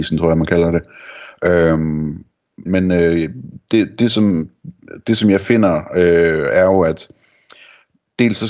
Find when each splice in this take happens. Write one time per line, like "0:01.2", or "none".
0:02.7